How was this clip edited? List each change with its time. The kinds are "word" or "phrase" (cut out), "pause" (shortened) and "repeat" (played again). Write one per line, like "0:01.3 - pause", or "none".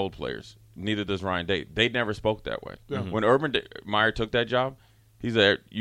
none